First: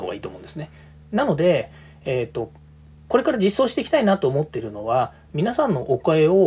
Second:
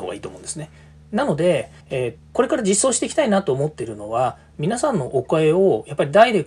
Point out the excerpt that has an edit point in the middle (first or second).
second